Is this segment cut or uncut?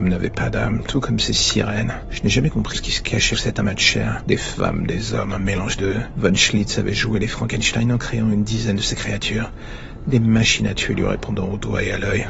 cut